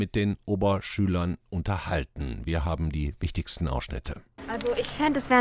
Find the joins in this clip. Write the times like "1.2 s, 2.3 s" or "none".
none